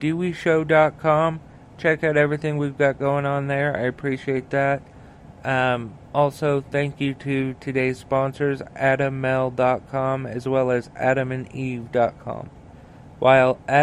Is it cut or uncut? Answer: uncut